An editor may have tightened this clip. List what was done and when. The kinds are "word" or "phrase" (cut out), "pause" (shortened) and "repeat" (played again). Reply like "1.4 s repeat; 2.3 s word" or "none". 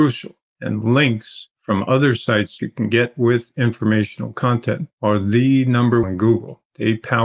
2.6 s phrase; 6.0 s phrase